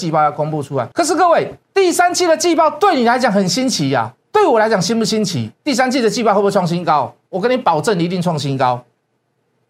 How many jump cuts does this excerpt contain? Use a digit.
4